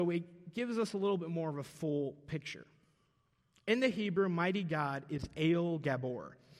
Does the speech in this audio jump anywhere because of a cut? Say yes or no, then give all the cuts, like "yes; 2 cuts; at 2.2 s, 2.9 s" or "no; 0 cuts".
no; 0 cuts